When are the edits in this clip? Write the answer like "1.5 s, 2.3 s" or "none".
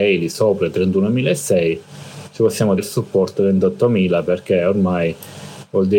2.8 s